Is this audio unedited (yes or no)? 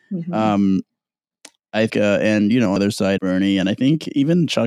no